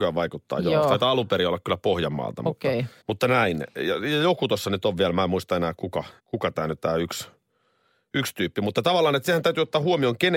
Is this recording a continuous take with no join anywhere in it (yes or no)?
no